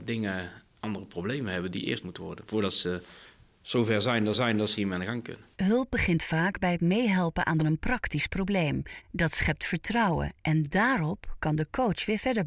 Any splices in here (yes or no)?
yes